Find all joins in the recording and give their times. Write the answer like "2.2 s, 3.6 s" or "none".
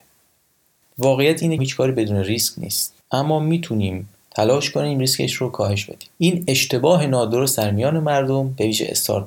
1.6 s, 3.0 s, 6.1 s